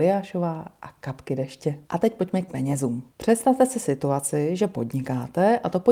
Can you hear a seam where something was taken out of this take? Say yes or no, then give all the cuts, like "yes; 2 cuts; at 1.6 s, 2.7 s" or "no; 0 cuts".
yes; 3 cuts; at 1.8 s, 2.5 s, 3.1 s